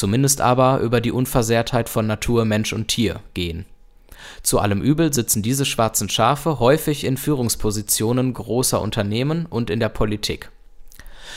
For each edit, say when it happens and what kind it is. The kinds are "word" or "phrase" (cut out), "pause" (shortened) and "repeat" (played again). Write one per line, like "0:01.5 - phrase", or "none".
none